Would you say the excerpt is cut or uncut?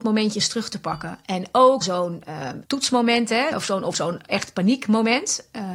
cut